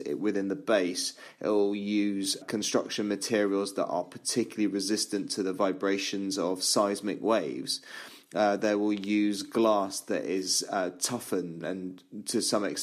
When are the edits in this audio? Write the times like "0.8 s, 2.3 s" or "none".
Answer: 2.4 s, 11.6 s